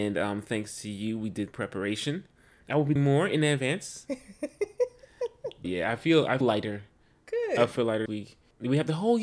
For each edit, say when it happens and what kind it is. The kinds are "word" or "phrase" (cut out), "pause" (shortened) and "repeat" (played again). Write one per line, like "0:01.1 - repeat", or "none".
0:01.5 - word
0:03.0 - word
0:05.6 - word
0:06.4 - word
0:08.1 - word